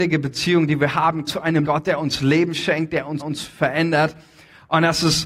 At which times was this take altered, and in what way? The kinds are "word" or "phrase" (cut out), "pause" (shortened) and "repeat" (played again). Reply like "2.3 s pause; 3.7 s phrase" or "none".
1.3 s word; 1.6 s word; 3.2 s repeat